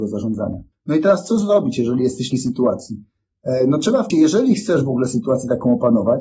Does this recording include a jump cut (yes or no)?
yes